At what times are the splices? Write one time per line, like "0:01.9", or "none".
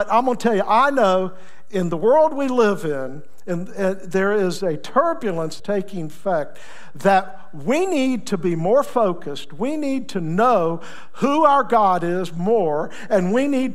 0:05.6